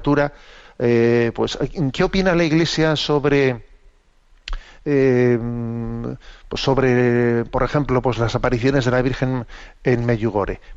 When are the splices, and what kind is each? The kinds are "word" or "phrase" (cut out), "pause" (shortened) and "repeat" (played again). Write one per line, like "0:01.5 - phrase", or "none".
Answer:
none